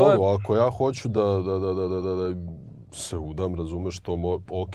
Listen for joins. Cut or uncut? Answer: uncut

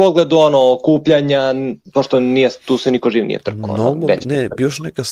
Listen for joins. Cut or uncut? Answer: uncut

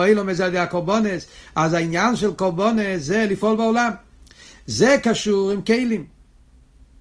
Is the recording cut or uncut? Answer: uncut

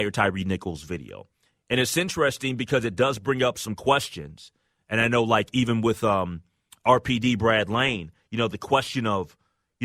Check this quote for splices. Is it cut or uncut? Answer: uncut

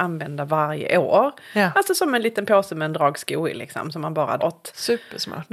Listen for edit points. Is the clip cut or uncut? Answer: cut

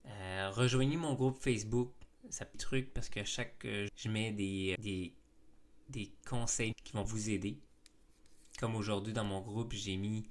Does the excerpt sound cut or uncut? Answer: cut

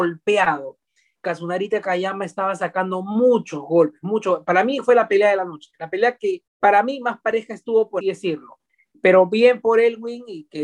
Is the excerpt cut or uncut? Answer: cut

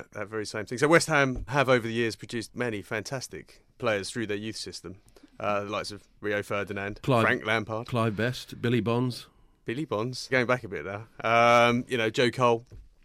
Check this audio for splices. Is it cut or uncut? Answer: cut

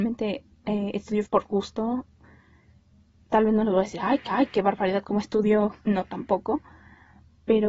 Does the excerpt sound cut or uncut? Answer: cut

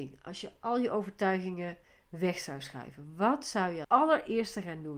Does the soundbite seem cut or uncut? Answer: cut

